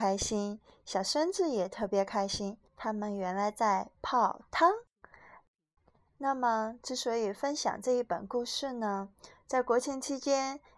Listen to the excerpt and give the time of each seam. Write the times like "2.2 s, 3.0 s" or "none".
2.7 s